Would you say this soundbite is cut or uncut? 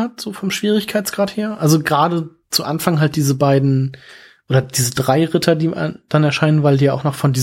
uncut